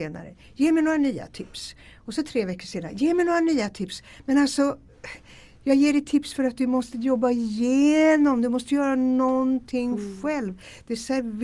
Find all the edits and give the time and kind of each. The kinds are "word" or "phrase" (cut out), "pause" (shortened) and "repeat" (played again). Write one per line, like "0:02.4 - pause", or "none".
none